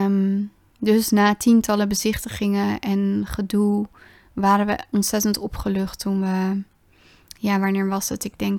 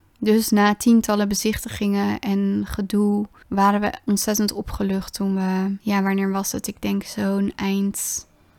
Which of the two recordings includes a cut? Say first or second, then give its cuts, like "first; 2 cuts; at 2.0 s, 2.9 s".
second; 2 cuts; at 3.4 s, 5.8 s